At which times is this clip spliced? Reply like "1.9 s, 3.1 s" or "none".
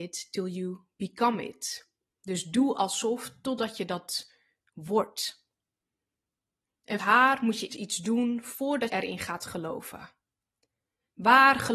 7.0 s, 7.7 s, 8.9 s